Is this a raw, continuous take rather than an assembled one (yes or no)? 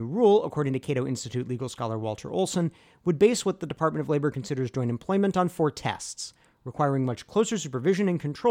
yes